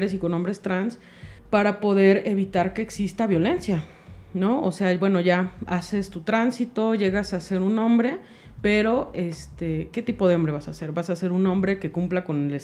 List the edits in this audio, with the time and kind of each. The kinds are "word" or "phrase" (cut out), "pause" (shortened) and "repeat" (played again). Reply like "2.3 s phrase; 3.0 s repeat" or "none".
1.4 s pause